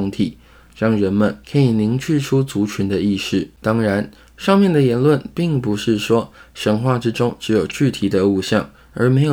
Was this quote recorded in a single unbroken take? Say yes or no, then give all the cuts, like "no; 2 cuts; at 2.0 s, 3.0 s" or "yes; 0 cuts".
no; 2 cuts; at 1.4 s, 3.6 s